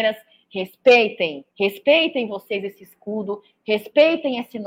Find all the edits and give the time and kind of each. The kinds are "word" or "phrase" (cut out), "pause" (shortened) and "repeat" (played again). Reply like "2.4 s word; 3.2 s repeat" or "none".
1.5 s pause